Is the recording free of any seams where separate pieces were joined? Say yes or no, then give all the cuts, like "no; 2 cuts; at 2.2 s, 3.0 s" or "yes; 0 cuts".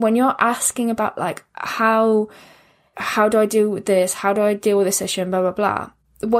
no; 1 cut; at 2.9 s